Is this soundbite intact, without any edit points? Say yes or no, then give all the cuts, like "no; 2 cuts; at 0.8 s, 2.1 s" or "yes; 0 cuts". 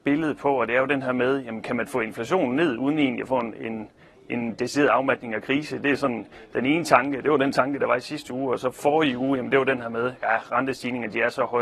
yes; 0 cuts